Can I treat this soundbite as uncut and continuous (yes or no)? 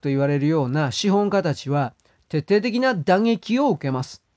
yes